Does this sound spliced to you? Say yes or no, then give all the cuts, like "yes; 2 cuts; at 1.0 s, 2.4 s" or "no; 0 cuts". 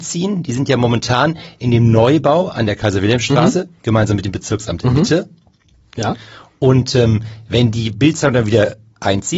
no; 0 cuts